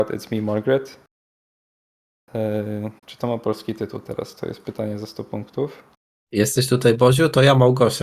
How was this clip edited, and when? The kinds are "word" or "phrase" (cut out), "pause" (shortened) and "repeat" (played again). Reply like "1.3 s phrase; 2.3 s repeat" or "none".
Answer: 3.0 s pause